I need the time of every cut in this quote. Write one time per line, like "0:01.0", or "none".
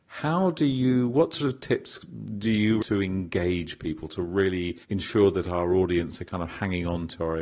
0:02.8
0:04.8